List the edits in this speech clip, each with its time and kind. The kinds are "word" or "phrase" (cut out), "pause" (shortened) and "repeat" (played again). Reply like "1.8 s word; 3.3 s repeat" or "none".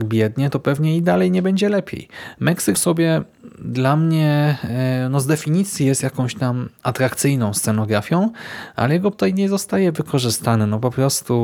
2.7 s word; 9.1 s word